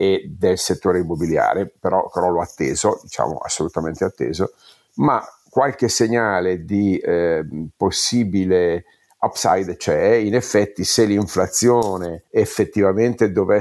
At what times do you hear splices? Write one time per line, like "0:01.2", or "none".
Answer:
none